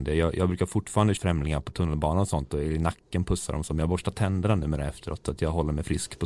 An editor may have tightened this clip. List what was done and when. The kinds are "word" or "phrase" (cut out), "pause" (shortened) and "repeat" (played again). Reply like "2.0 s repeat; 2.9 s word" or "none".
1.2 s word